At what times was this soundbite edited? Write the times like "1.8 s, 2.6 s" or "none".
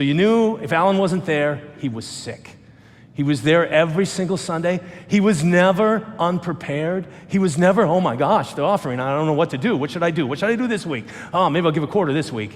none